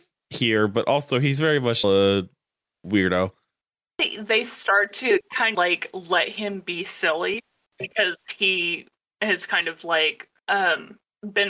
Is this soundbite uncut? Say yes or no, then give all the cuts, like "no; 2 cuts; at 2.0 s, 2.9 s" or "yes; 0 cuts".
no; 3 cuts; at 1.8 s, 5.5 s, 10.4 s